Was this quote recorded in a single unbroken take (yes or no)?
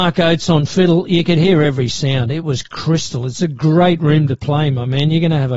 yes